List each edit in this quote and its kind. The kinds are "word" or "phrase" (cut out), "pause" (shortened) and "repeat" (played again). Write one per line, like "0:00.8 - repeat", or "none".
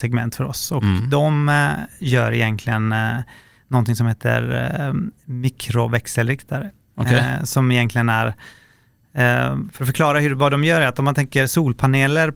none